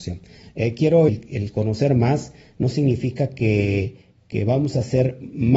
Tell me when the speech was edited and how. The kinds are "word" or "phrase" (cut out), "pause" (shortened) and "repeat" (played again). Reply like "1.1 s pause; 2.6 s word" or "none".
1.1 s phrase